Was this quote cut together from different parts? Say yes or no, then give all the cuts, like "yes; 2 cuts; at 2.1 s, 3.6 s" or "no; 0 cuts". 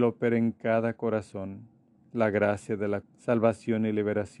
yes; 1 cut; at 3.0 s